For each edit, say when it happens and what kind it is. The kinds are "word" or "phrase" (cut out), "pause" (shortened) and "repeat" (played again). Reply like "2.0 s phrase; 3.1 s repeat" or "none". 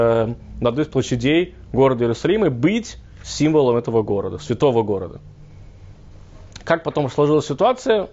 none